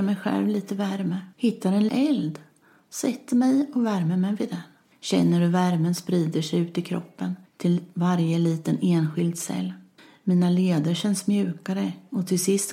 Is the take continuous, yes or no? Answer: no